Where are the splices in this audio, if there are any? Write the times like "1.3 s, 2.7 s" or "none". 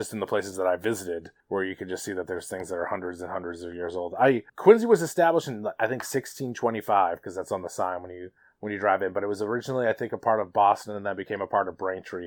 1.4 s, 4.5 s, 8.4 s